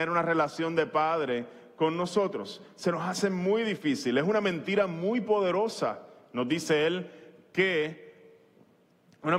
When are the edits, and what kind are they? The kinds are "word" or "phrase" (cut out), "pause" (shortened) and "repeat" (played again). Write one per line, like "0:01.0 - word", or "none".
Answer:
none